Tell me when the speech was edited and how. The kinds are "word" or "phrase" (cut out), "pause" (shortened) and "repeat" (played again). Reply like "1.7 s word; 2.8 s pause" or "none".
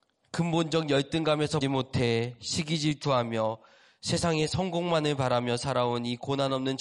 1.6 s word